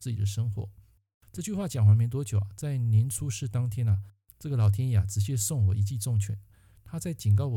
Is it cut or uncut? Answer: uncut